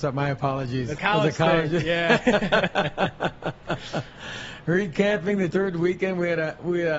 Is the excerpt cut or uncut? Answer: cut